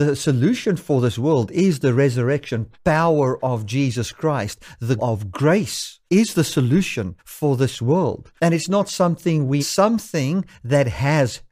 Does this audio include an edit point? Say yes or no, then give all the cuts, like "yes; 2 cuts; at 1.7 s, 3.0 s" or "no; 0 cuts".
yes; 6 cuts; at 2.7 s, 5.0 s, 6.1 s, 7.2 s, 8.4 s, 9.6 s